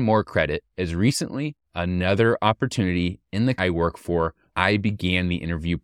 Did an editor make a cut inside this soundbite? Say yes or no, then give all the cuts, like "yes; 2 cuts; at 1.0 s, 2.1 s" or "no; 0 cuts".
yes; 3 cuts; at 1.6 s, 3.6 s, 4.5 s